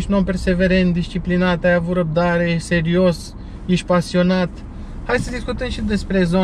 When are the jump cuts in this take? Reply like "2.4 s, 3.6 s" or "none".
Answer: none

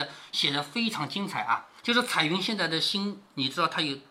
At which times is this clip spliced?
1.8 s

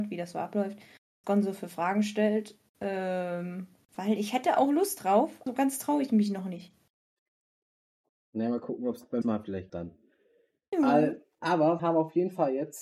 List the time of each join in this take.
1.2 s, 5.5 s, 9.2 s, 9.7 s, 11.8 s

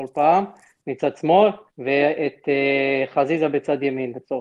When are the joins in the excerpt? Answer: 1.7 s

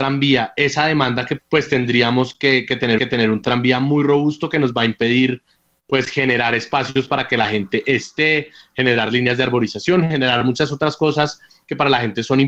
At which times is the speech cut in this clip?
1.4 s, 3.0 s

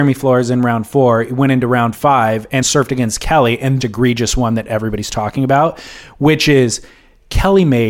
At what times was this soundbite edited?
2.6 s, 3.8 s

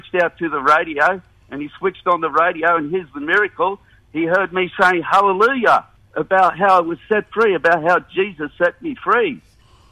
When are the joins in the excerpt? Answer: 6.0 s

